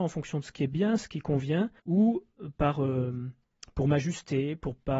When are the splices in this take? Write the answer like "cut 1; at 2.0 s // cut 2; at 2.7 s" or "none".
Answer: cut 1; at 1.8 s // cut 2; at 3.4 s